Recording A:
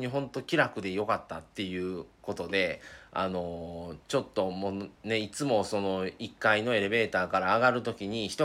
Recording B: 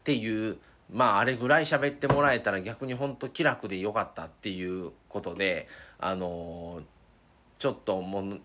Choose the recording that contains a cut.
A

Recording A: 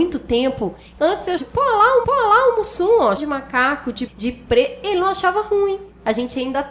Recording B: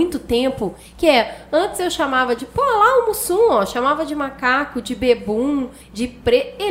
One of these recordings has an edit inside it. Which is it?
A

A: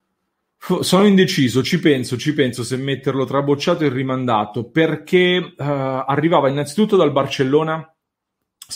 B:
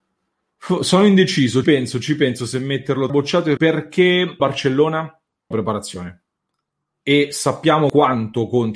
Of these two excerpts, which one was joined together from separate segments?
B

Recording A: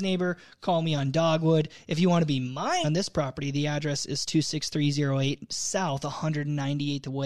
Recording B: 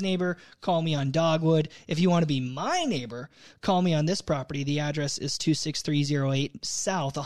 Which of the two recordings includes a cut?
A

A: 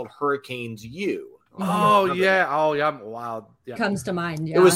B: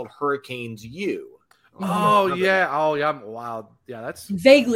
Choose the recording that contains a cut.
A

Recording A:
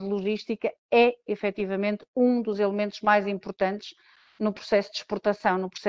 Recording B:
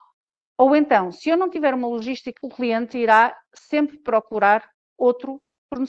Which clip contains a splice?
B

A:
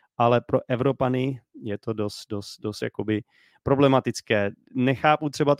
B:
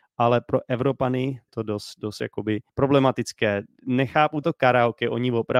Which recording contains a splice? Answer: B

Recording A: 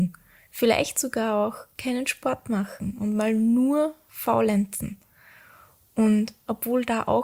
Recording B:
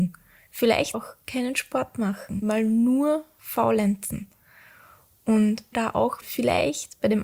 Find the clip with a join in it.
B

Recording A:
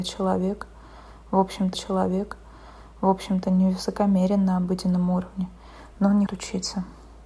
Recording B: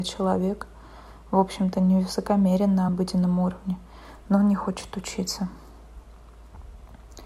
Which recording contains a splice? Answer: A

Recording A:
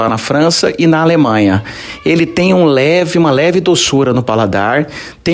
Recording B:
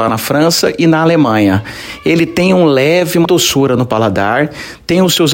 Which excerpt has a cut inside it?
B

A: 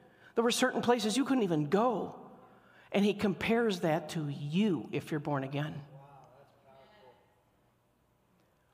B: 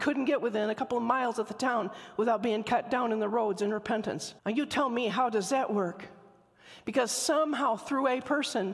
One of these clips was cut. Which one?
B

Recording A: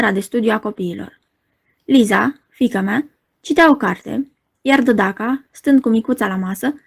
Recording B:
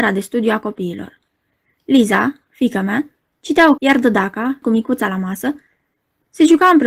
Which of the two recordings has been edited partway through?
B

